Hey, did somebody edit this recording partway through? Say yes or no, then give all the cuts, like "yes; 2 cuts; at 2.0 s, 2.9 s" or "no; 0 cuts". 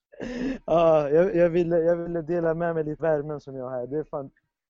yes; 2 cuts; at 1.3 s, 3.0 s